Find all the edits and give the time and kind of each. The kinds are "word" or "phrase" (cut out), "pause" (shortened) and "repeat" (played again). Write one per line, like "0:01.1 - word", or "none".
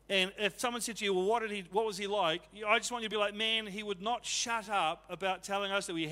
none